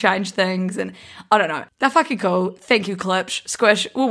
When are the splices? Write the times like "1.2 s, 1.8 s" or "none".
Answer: none